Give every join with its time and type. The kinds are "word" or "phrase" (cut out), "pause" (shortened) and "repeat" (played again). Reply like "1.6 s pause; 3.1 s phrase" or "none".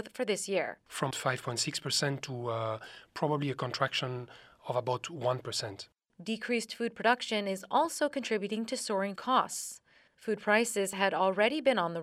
1.1 s word; 9.2 s word